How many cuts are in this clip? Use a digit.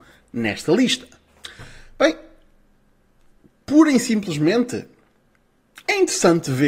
0